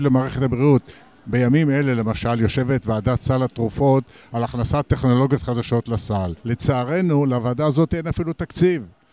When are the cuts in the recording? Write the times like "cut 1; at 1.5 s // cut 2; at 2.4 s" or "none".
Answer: cut 1; at 6.4 s